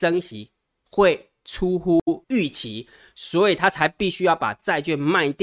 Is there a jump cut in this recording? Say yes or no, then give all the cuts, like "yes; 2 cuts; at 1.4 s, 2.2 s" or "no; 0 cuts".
yes; 1 cut; at 2.2 s